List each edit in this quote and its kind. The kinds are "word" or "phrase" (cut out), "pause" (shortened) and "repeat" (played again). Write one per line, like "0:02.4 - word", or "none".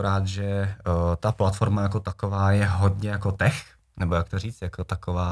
0:03.8 - pause